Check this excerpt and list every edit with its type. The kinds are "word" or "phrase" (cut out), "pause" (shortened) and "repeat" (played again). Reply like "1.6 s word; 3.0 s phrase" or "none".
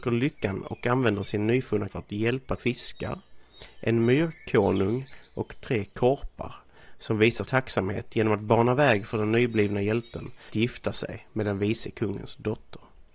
1.9 s word; 2.6 s word; 7.4 s word; 10.5 s word